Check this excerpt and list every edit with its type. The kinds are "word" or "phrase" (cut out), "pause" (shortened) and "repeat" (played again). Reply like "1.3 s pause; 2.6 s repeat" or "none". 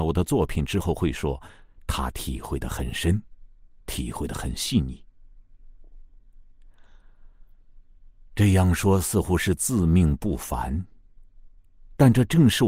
none